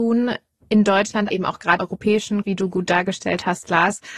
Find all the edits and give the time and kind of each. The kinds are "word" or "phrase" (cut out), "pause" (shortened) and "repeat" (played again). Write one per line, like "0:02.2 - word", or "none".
0:01.3 - word
0:01.8 - word
0:02.4 - word